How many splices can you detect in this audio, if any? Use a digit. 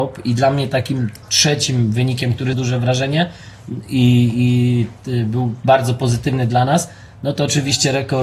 2